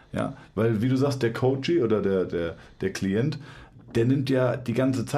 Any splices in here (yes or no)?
no